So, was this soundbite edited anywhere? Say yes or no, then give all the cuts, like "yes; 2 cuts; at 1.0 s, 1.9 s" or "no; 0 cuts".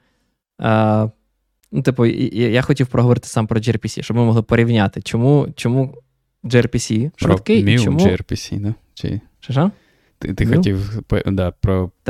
no; 0 cuts